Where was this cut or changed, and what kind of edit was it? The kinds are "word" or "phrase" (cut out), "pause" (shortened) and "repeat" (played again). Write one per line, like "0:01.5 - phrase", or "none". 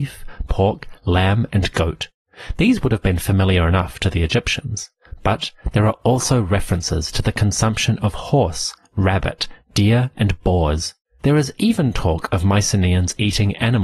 none